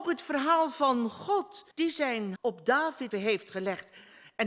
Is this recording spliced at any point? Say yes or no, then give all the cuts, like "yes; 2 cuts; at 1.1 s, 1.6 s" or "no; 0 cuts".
yes; 3 cuts; at 1.7 s, 2.4 s, 3.1 s